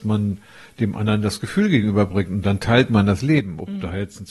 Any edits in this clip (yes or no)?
no